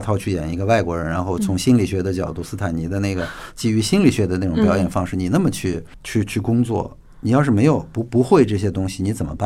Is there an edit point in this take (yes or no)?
no